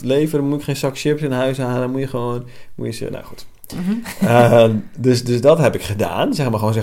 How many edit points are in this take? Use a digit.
0